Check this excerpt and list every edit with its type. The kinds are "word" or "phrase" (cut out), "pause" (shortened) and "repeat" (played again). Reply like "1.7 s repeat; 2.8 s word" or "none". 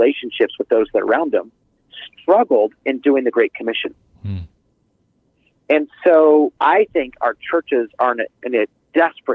6.6 s pause